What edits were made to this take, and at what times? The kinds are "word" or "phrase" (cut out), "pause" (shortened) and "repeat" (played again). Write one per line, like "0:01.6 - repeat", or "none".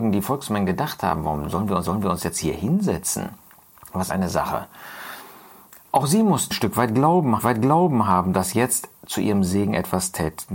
0:01.8 - repeat
0:04.1 - phrase
0:06.5 - word
0:07.4 - repeat
0:09.0 - pause